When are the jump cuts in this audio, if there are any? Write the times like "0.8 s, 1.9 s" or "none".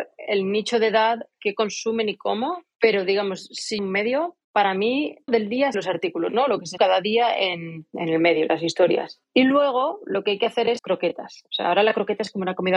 2.7 s, 3.8 s, 5.3 s, 5.7 s, 6.8 s, 10.8 s